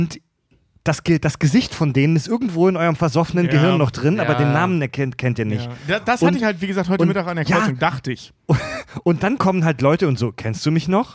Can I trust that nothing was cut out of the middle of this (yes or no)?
yes